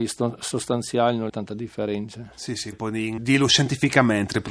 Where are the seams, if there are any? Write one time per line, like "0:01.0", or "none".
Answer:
0:01.3
0:02.7
0:03.2